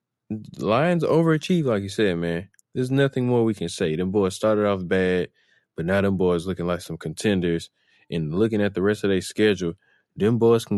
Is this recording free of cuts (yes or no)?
yes